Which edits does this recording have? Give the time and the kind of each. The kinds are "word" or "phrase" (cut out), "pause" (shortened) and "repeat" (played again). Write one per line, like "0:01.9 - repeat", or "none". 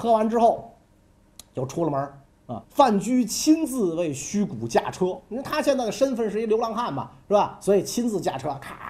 0:02.6 - pause